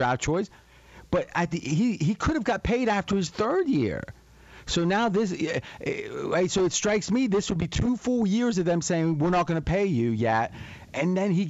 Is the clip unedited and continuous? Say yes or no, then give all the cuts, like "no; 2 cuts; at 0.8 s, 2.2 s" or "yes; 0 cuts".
yes; 0 cuts